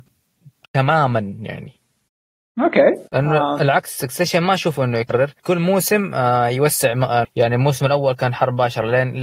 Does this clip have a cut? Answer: yes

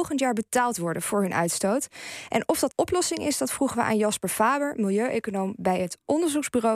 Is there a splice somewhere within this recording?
yes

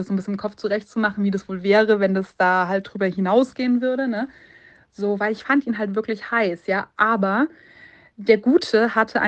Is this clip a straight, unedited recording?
yes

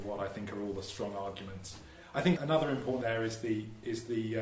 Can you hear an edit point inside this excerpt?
yes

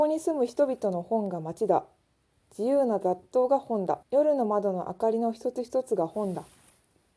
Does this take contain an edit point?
yes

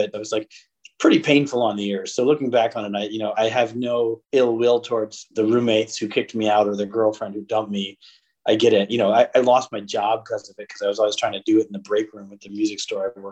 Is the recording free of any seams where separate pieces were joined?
yes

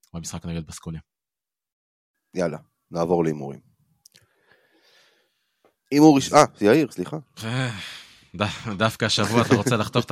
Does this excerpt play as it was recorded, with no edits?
yes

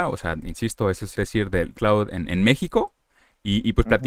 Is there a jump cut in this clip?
yes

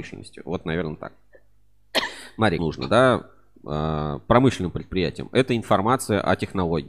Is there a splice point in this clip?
yes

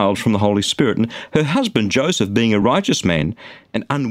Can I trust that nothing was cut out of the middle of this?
yes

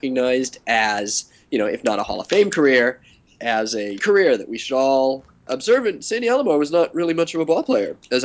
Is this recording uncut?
no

